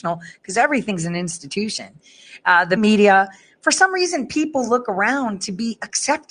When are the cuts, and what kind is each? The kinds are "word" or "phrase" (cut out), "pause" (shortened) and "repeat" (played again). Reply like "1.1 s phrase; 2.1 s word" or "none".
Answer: 2.8 s word

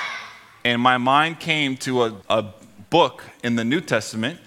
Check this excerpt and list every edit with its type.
2.2 s pause

